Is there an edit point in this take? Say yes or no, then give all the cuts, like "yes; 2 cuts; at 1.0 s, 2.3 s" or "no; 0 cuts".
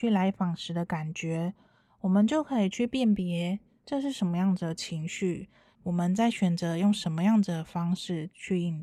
no; 0 cuts